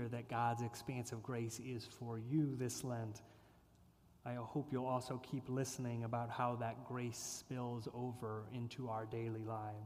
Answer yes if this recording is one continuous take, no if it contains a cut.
yes